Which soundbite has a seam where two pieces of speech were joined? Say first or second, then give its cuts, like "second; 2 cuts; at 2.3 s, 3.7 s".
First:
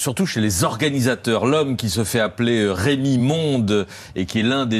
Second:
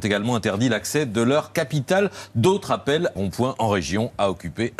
second; 1 cut; at 3.2 s